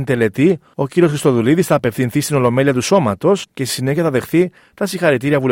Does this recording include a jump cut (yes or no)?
no